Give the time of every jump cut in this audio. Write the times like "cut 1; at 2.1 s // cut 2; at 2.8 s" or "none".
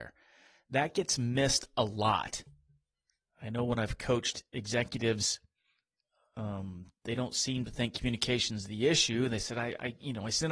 none